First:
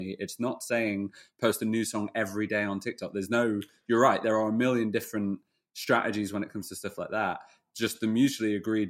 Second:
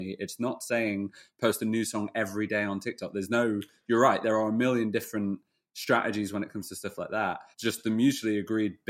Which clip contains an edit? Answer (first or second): second